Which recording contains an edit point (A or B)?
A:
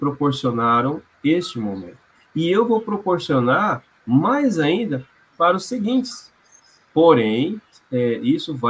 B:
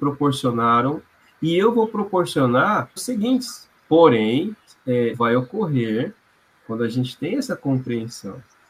B